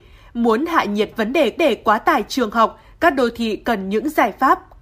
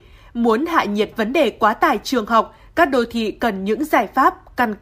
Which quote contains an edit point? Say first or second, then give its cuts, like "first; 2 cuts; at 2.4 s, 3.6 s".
first; 1 cut; at 1.6 s